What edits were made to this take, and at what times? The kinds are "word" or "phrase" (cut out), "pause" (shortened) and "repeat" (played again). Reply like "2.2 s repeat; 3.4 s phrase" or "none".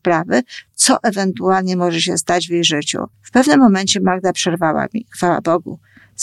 3.1 s pause